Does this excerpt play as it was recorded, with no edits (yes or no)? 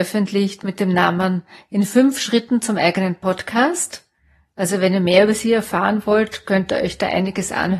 yes